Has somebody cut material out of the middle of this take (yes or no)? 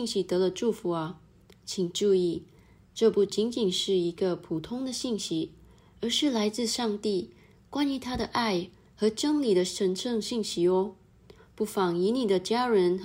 no